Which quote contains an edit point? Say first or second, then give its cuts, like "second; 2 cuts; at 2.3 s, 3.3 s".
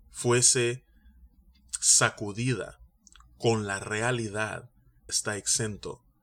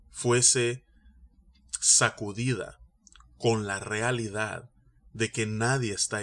first; 1 cut; at 5.1 s